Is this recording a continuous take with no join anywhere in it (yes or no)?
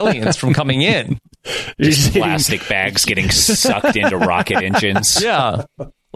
yes